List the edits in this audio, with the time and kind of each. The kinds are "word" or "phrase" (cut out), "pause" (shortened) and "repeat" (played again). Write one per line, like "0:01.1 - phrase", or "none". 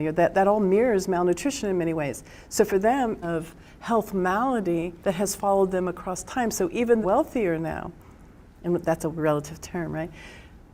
0:03.2 - phrase
0:05.0 - pause
0:07.0 - phrase